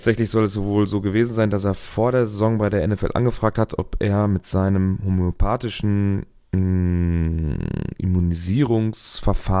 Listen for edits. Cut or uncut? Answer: uncut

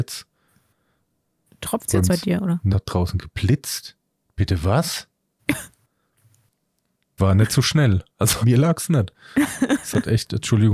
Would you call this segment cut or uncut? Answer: cut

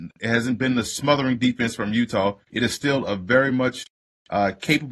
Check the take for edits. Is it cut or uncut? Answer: cut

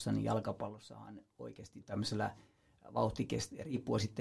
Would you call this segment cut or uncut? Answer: cut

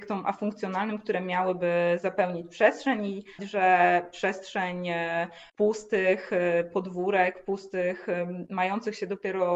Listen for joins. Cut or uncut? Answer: cut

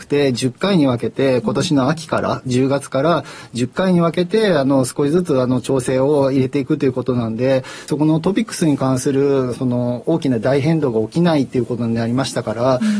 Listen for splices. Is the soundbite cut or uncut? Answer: cut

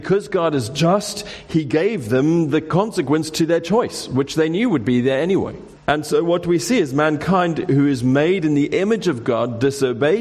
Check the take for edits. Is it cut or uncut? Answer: cut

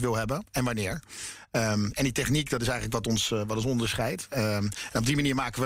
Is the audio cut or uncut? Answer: uncut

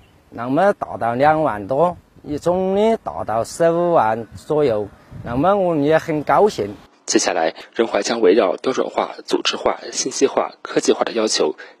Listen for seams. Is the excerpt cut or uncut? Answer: uncut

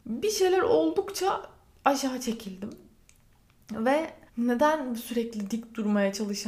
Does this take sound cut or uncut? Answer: cut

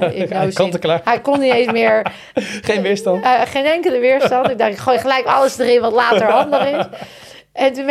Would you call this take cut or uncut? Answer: uncut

